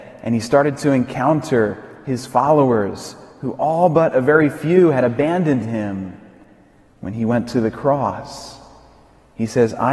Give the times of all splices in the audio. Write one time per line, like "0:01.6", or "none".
none